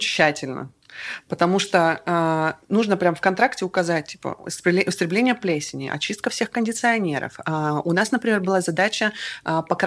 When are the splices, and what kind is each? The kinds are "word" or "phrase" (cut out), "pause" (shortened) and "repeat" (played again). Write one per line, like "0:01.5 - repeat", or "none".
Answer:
none